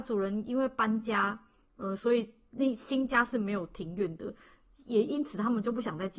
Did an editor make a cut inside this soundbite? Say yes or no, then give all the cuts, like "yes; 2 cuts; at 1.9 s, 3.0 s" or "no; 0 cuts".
no; 0 cuts